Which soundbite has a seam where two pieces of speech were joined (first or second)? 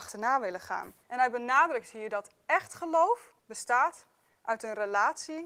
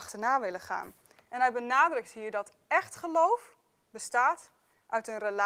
first